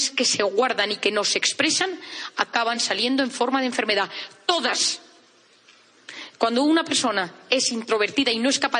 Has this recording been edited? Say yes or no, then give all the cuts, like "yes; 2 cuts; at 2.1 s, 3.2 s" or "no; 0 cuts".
no; 0 cuts